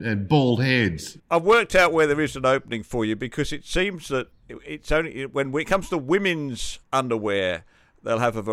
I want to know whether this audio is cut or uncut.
cut